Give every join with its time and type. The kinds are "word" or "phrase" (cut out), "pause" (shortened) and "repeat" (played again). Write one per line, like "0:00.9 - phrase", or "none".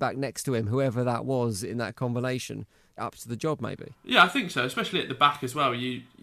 0:03.0 - phrase
0:04.0 - pause